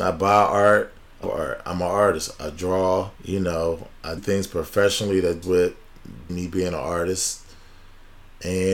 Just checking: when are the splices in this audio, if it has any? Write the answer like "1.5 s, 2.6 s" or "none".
1.2 s, 3.2 s, 4.2 s, 5.4 s, 6.3 s